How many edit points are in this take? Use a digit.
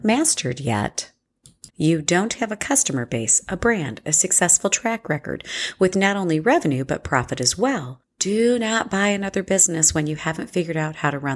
2